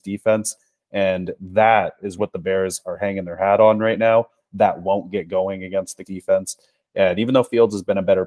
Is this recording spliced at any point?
yes; 2 cuts; at 2.2 s, 6.0 s

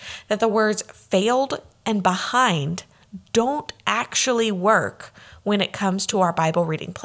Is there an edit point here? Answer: no; 0 cuts

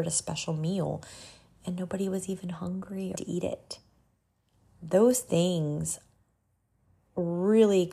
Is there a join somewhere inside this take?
yes; 1 cut; at 3.2 s

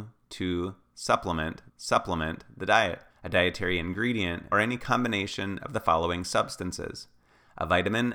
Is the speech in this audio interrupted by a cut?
yes; 3 cuts; at 1.7 s, 3.1 s, 4.5 s

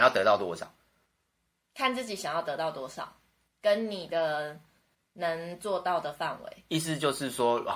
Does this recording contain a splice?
no; 0 cuts

